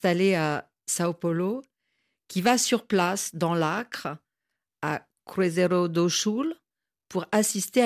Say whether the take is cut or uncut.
uncut